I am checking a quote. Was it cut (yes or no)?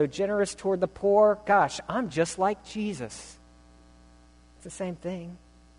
no